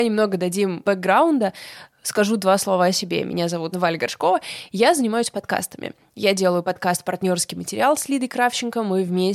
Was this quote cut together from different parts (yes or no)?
yes